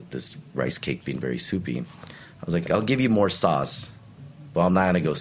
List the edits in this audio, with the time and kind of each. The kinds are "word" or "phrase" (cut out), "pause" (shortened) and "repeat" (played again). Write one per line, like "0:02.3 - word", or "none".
0:01.0 - word
0:02.6 - word

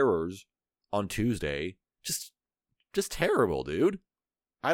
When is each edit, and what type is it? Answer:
none

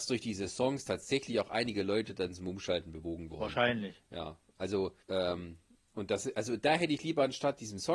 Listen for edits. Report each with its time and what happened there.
0:05.0 - pause

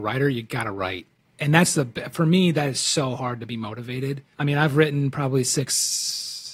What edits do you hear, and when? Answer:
0:01.2 - pause
0:04.3 - pause

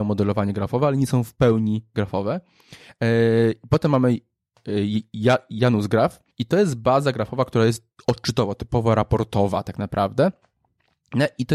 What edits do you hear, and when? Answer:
0:06.3 - pause

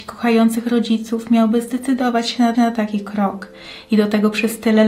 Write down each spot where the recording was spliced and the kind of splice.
0:02.5 - repeat

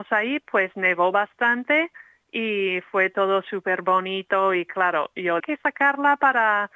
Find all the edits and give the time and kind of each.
0:05.4 - phrase

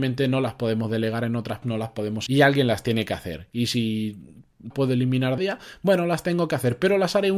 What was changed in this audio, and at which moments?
0:01.6 - word
0:02.3 - word
0:04.7 - phrase
0:05.4 - phrase

